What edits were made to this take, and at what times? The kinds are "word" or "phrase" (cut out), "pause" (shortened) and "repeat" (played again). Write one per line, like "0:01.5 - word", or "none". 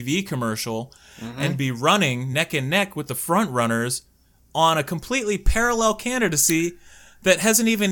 none